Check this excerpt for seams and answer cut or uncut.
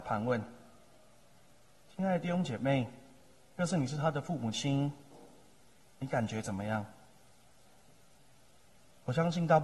uncut